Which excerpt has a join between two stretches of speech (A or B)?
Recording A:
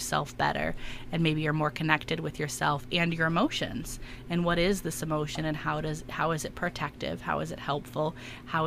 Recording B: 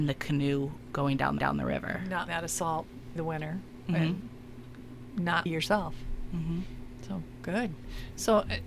B